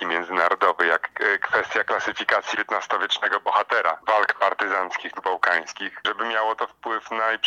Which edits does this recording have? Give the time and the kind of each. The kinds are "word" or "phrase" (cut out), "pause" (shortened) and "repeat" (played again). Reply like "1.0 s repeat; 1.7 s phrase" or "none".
2.5 s phrase; 5.2 s word